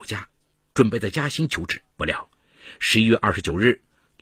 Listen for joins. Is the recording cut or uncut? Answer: cut